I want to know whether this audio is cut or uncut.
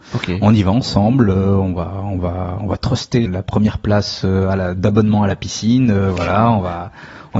cut